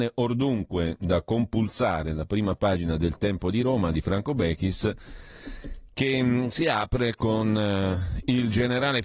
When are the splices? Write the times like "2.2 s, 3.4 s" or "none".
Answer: none